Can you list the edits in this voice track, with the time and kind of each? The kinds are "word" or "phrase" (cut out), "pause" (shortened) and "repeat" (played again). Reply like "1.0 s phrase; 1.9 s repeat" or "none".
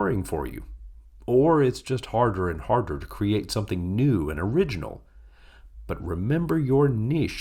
none